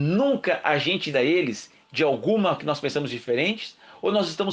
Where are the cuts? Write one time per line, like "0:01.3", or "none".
0:01.1
0:02.6